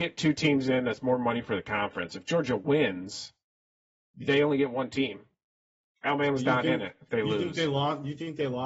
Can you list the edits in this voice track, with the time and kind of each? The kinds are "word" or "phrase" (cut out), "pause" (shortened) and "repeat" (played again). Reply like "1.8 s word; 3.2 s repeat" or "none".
none